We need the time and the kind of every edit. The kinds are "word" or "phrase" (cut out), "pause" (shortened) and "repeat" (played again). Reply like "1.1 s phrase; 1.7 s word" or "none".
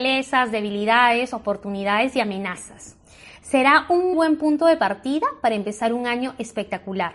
4.1 s word